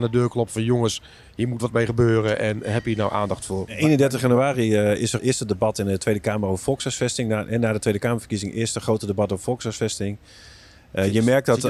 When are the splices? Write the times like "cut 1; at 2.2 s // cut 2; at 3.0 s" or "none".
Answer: cut 1; at 5.2 s